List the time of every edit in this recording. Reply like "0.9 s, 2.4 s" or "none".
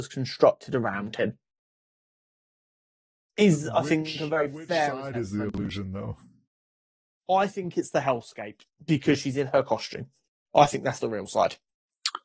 none